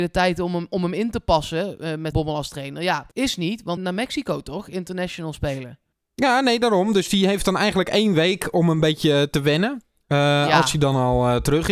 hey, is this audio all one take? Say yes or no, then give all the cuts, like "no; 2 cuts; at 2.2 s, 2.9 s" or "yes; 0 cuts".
no; 4 cuts; at 2.1 s, 3.1 s, 3.8 s, 5.9 s